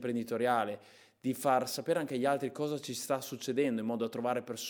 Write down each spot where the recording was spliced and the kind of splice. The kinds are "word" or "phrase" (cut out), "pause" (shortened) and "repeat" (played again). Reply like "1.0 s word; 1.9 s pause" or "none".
none